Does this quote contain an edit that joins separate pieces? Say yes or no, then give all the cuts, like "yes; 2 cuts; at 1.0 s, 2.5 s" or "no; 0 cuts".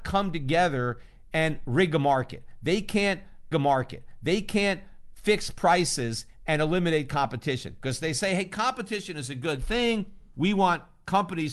yes; 1 cut; at 3.5 s